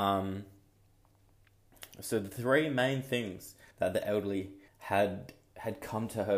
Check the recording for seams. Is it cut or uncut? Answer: cut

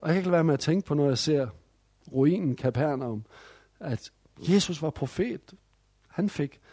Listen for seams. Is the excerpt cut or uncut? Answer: uncut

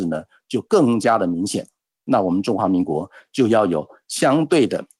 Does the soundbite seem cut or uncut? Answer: uncut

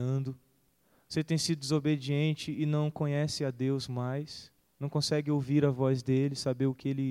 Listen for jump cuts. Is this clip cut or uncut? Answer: uncut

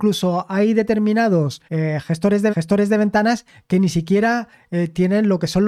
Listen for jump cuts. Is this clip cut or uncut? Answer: cut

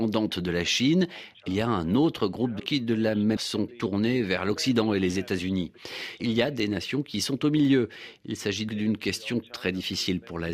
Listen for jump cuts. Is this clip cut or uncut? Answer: cut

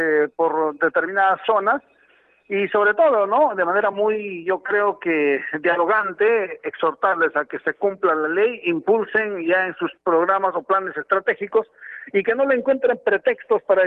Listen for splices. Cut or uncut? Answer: uncut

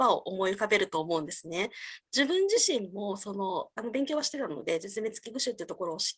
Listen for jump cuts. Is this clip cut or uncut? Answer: uncut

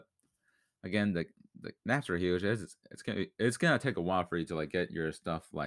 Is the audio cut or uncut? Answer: uncut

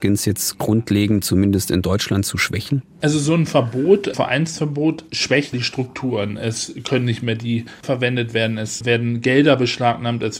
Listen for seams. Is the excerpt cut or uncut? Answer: cut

